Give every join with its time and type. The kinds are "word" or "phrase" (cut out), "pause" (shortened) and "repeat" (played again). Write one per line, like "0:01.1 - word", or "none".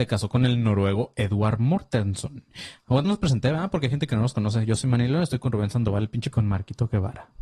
0:03.0 - word
0:06.3 - phrase